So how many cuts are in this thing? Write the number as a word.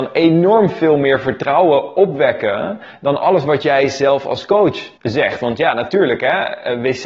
one